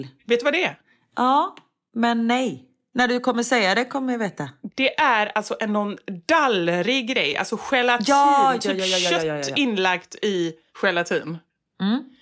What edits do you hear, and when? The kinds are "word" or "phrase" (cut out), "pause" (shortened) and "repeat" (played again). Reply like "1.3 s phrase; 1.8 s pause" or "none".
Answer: none